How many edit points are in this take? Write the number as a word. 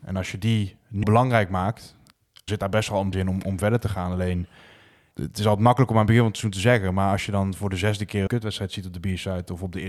five